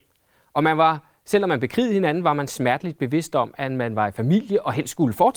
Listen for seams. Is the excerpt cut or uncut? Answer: uncut